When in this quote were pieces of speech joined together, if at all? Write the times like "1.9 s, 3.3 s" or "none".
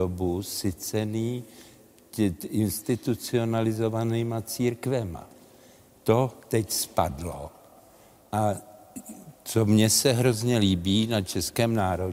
6.4 s